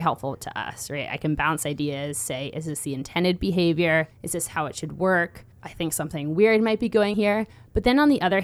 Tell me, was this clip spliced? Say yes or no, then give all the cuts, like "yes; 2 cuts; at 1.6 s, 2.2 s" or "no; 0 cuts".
yes; 3 cuts; at 4.1 s, 5.5 s, 7.1 s